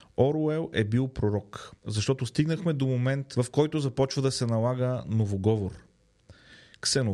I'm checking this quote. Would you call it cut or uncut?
uncut